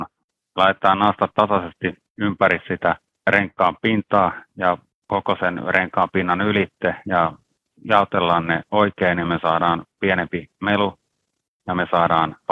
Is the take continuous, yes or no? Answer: yes